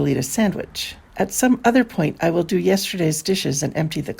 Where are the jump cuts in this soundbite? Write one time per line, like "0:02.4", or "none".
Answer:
0:01.0